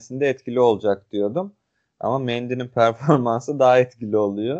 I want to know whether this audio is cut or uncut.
uncut